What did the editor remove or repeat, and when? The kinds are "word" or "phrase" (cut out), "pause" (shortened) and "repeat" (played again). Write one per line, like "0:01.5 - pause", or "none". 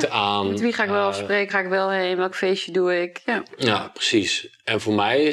0:01.5 - word